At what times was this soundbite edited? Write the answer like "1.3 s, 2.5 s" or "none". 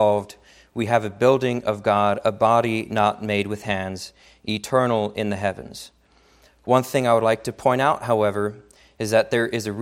none